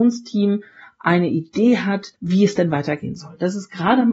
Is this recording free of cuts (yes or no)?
no